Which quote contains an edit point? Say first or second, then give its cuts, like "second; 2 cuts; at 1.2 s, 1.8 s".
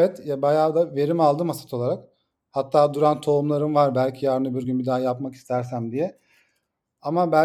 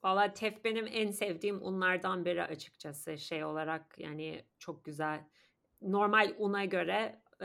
second; 1 cut; at 5.7 s